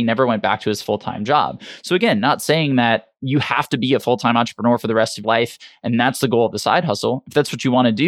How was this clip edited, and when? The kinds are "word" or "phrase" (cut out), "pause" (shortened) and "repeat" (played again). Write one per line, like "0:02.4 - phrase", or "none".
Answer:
0:05.2 - word

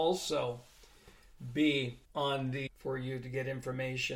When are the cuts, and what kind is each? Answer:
0:02.0 - pause
0:02.7 - word

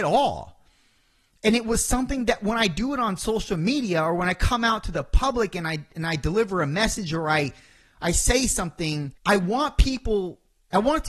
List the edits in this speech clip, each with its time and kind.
0:09.2 - pause

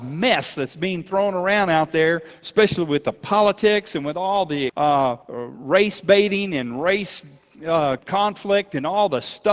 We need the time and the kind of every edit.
0:04.7 - word
0:05.2 - pause
0:08.0 - word

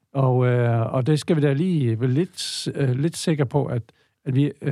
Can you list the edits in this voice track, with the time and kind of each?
none

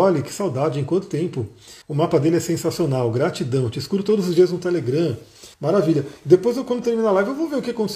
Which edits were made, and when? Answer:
0:01.8 - pause
0:05.5 - pause

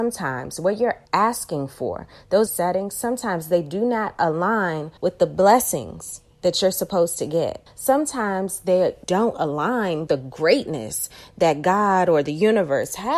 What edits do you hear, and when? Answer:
0:01.1 - pause
0:02.5 - phrase
0:05.0 - pause
0:07.7 - pause
0:09.0 - word
0:10.1 - word

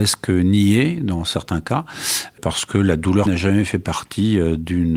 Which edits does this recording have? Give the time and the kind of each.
0:03.3 - word

